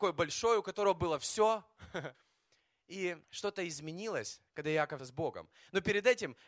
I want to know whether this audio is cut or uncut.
cut